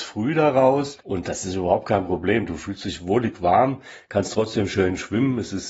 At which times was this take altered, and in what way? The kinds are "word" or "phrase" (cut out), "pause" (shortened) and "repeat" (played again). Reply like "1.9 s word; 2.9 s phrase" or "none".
1.0 s pause